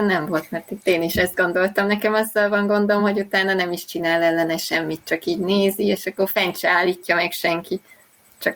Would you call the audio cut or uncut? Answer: uncut